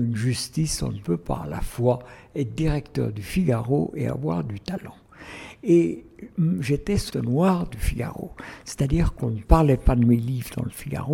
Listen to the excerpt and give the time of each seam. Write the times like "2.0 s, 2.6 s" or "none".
7.1 s